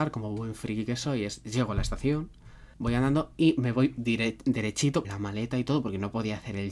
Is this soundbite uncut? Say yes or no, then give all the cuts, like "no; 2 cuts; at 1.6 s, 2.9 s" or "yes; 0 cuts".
no; 2 cuts; at 2.7 s, 5.0 s